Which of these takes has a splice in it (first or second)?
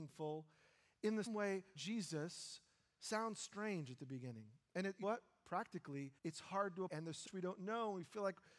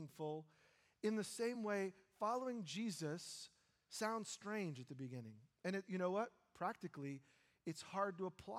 first